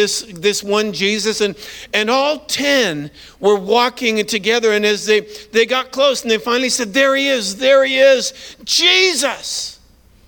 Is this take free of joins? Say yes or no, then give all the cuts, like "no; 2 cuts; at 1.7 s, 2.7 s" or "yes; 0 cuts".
yes; 0 cuts